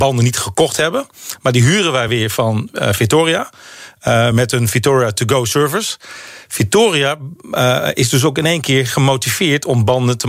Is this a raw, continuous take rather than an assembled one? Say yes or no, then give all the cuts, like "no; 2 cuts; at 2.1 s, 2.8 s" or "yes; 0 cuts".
yes; 0 cuts